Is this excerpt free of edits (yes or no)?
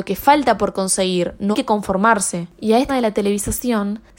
no